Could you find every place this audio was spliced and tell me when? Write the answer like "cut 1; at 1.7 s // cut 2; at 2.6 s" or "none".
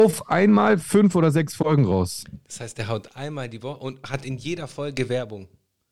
none